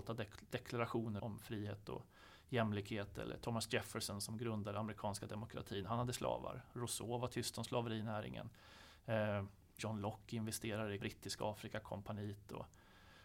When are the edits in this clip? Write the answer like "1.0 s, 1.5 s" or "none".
1.2 s, 9.8 s, 11.0 s

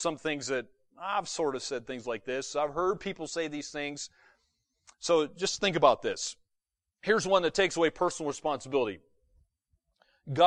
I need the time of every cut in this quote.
none

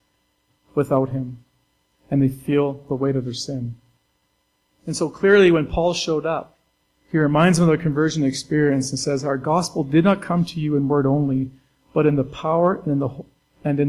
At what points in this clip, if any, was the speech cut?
none

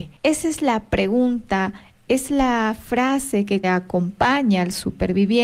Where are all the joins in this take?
2.3 s, 3.6 s

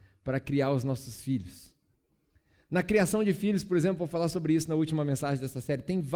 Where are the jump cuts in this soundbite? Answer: none

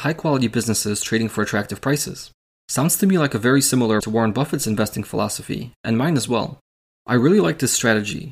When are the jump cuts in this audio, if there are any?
4.0 s

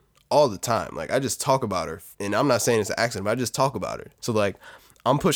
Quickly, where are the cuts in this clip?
2.1 s, 4.2 s

